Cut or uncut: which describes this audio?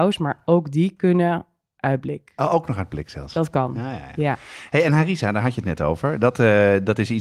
uncut